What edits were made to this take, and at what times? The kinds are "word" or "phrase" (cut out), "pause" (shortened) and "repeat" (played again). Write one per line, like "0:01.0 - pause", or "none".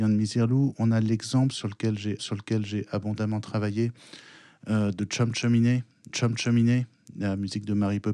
0:02.2 - repeat
0:06.1 - repeat